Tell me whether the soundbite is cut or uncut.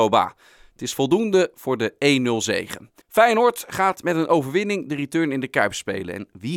cut